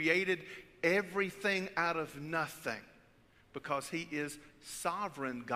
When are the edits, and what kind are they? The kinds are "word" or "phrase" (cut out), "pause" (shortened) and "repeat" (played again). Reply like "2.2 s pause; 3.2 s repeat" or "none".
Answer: none